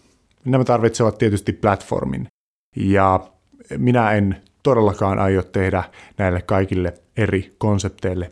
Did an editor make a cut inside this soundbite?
no; 0 cuts

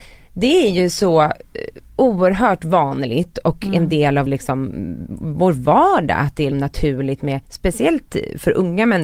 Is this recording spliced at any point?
yes; 2 cuts; at 4.3 s, 6.5 s

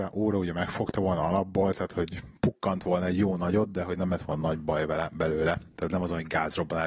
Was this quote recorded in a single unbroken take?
yes; 0 cuts

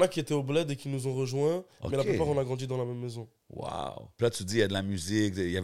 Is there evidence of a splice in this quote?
no; 0 cuts

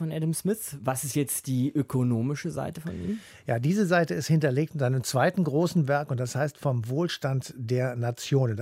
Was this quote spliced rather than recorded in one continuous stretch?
no; 0 cuts

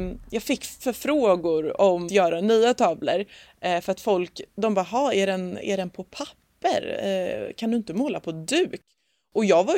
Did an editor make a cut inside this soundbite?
yes; 1 cut; at 2.1 s

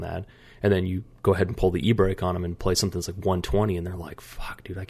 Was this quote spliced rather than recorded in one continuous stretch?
no; 0 cuts

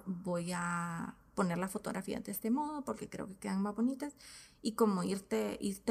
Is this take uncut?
yes; 0 cuts

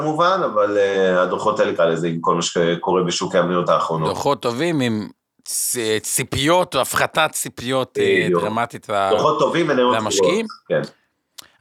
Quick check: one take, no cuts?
no; 2 cuts; at 1.8 s, 3.7 s

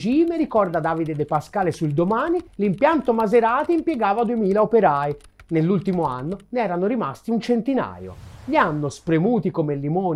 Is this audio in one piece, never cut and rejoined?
no; 1 cut; at 2.5 s

